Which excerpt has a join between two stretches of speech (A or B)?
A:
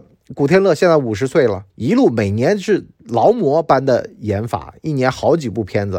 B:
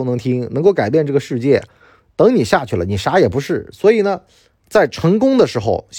A